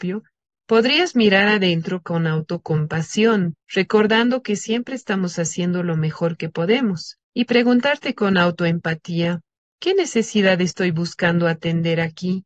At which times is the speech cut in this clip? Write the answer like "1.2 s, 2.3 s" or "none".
3.6 s, 7.2 s, 9.6 s